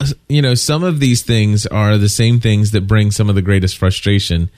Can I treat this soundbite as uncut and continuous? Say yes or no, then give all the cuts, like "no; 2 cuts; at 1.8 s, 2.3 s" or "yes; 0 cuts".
yes; 0 cuts